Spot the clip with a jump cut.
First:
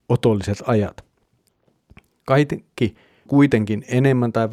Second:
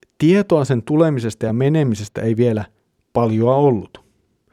first; 1 cut; at 3.3 s

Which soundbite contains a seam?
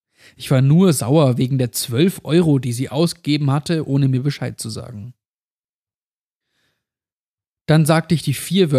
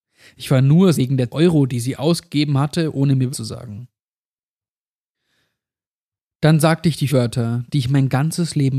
second; 4 cuts; at 0.9 s, 1.3 s, 3.3 s, 7.1 s

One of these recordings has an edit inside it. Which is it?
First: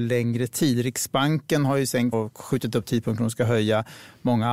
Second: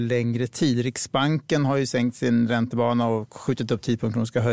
first; 1 cut; at 2.1 s

